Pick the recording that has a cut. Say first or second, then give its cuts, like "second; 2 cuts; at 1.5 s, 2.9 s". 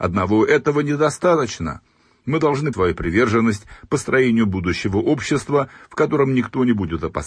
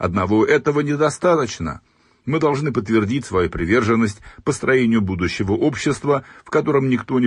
first; 1 cut; at 2.7 s